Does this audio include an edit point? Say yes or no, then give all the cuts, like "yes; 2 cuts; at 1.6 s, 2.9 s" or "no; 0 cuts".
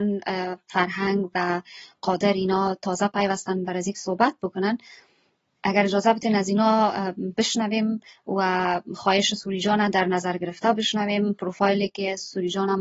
no; 0 cuts